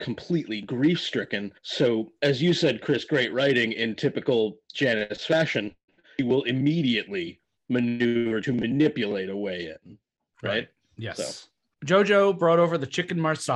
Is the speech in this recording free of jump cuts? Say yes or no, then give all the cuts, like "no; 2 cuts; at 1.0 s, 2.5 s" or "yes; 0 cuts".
no; 1 cut; at 1.6 s